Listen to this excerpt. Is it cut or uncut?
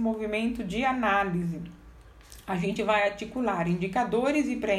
uncut